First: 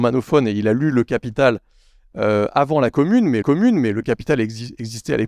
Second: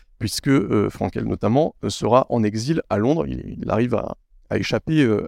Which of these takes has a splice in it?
first; 1 cut; at 3.4 s

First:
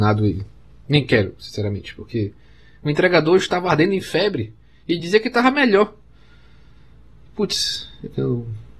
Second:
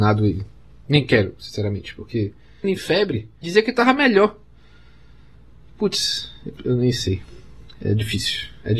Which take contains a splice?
second; 3 cuts; at 2.6 s, 3.4 s, 6.6 s

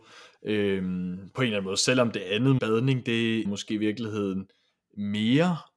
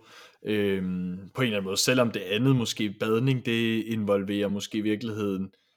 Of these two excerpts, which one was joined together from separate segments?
first; 2 cuts; at 2.6 s, 3.5 s

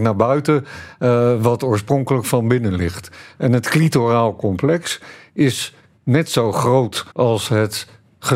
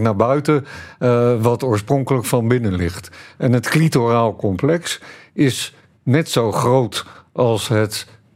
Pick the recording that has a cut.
first; 1 cut; at 7.1 s

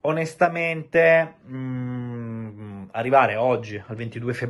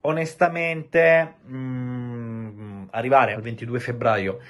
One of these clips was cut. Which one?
second; 1 cut; at 3.3 s

